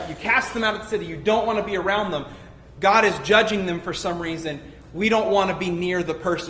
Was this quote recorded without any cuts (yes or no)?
yes